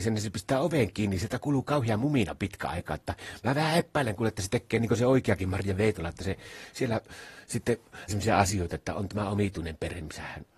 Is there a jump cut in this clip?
yes; 1 cut; at 8.1 s

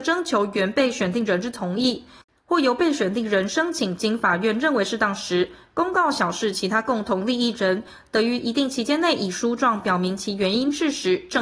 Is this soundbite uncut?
yes; 0 cuts

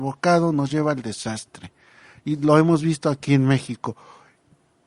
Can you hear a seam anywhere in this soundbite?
no; 0 cuts

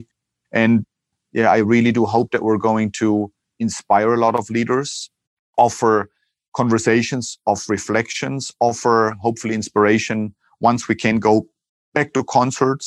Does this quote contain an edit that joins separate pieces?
no; 0 cuts

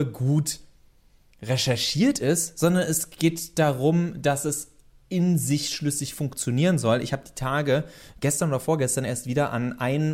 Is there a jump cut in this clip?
no; 0 cuts

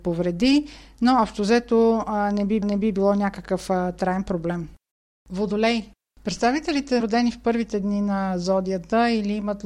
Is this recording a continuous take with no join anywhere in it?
no; 2 cuts; at 2.6 s, 7.0 s

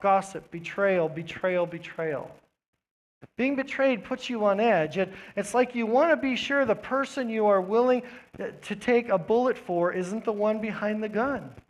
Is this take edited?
no; 0 cuts

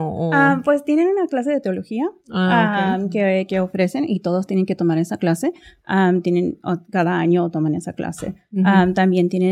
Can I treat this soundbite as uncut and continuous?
yes; 0 cuts

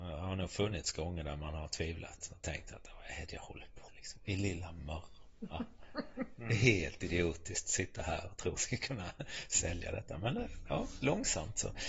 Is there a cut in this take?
yes; 2 cuts; at 3.9 s, 8.6 s

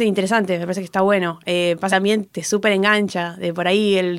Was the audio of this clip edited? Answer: yes; 2 cuts; at 1.9 s, 2.2 s

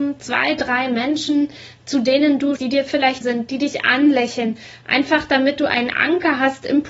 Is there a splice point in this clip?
yes; 2 cuts; at 2.6 s, 3.2 s

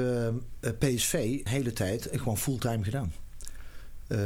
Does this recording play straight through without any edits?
no; 1 cut; at 1.5 s

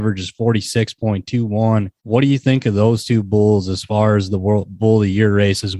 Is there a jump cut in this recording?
yes; 1 cut; at 2.0 s

